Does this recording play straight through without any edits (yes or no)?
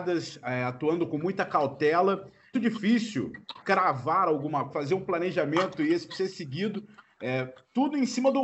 no